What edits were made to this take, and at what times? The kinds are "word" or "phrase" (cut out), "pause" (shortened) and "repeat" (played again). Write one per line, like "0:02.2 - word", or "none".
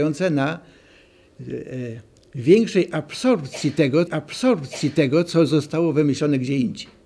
0:04.1 - repeat